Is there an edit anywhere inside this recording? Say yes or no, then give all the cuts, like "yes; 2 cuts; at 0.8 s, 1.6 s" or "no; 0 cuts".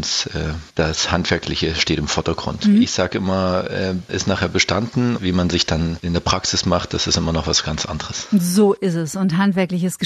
yes; 2 cuts; at 4.1 s, 5.2 s